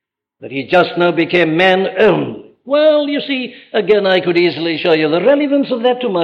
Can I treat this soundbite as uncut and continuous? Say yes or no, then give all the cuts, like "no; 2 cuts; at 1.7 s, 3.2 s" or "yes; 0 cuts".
yes; 0 cuts